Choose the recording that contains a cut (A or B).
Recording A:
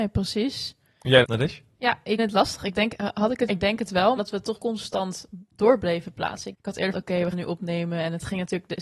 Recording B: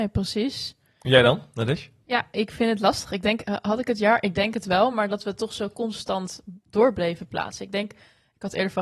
A